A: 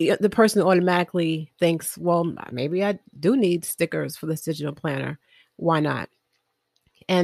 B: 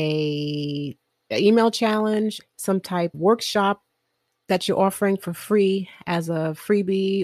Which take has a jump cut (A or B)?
B